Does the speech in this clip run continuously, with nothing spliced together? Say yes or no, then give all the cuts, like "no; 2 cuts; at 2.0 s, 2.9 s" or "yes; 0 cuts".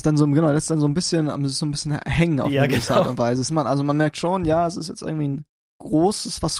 no; 1 cut; at 3.5 s